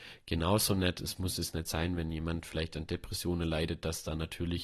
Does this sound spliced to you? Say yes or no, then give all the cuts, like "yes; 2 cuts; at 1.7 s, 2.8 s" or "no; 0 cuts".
no; 0 cuts